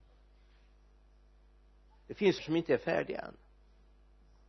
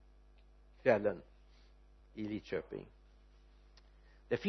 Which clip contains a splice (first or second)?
first